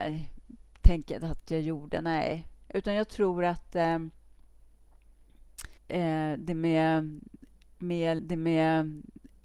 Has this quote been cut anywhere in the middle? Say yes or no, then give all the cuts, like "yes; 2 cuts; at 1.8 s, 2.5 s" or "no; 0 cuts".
yes; 2 cuts; at 5.8 s, 8.2 s